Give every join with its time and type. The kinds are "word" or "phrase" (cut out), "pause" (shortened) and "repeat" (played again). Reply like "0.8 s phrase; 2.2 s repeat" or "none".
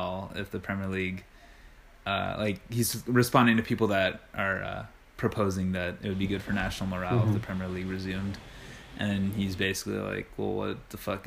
none